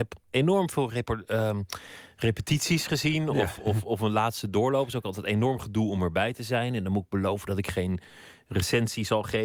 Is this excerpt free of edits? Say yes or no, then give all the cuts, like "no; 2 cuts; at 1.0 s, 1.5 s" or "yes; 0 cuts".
yes; 0 cuts